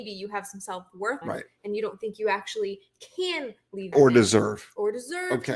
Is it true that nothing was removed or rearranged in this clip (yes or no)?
no